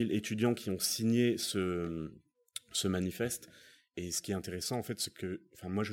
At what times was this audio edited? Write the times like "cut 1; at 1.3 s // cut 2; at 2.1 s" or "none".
none